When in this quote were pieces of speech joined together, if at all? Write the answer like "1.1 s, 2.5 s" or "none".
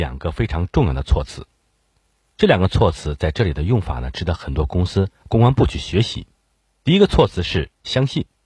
none